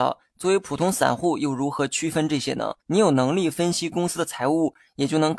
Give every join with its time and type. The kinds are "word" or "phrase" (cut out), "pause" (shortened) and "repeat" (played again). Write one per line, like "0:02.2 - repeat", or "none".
0:02.8 - pause